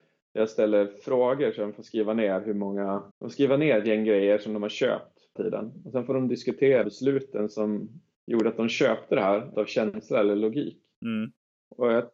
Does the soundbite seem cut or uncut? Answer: cut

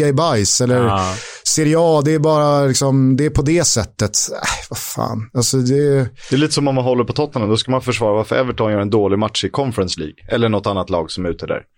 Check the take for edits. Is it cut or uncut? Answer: uncut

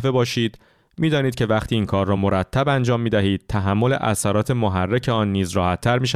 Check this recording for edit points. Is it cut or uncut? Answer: uncut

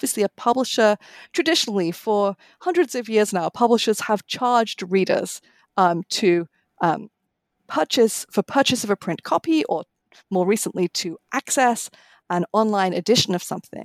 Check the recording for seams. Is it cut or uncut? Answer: uncut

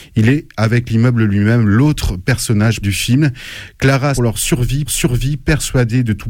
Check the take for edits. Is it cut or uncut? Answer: cut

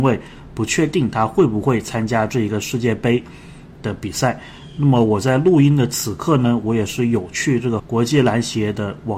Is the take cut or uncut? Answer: cut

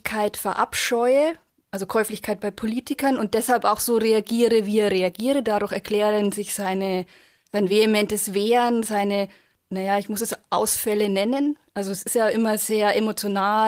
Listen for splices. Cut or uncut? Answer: uncut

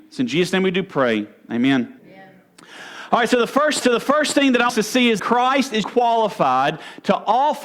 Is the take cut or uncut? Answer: cut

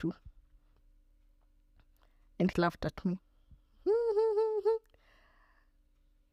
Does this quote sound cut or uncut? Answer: cut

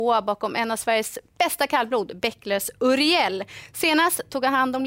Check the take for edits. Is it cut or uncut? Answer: uncut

